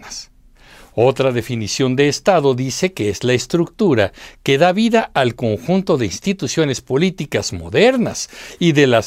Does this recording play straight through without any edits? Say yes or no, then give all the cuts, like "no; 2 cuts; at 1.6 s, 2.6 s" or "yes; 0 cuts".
yes; 0 cuts